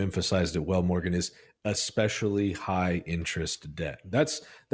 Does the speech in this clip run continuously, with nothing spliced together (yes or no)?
yes